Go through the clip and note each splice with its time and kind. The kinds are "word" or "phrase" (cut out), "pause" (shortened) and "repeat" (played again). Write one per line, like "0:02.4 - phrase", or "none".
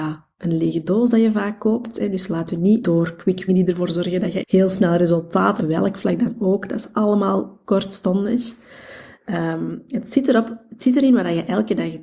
0:02.8 - word
0:03.5 - phrase
0:04.4 - word
0:05.6 - phrase
0:06.9 - phrase